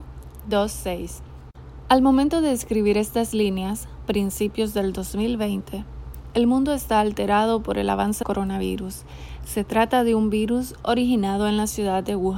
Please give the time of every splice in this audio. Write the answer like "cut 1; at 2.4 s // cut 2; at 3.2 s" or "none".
cut 1; at 8.2 s